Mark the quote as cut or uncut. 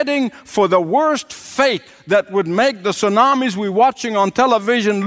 uncut